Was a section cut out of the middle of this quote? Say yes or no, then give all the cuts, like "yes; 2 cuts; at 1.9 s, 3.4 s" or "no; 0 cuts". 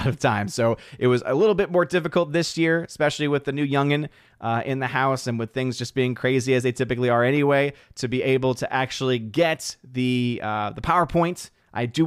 no; 0 cuts